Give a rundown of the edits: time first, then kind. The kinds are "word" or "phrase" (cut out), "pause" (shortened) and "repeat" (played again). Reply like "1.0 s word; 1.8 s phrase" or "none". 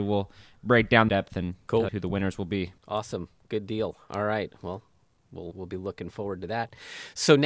1.1 s phrase; 1.9 s word; 2.8 s pause; 5.5 s word

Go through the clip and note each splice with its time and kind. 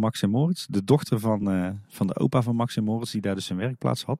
none

